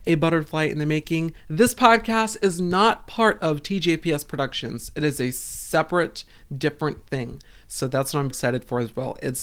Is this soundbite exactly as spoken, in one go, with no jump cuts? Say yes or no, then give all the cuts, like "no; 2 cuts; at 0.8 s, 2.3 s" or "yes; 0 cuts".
no; 1 cut; at 8.3 s